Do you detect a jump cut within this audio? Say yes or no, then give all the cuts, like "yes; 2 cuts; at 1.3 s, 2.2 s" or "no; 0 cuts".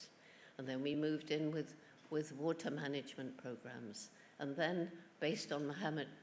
no; 0 cuts